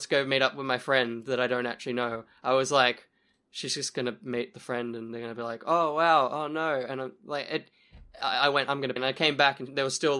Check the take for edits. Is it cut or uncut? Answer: cut